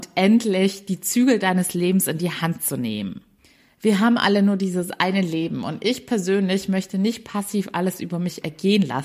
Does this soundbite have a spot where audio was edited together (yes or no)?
no